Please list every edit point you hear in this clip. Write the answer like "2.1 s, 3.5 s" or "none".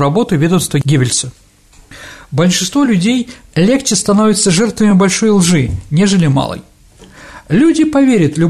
none